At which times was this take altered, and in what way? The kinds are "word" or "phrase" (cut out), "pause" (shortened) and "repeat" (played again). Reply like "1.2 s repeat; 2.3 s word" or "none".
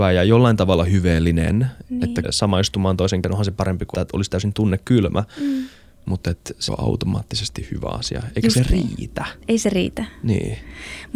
2.2 s word; 3.2 s word; 3.9 s word; 6.7 s word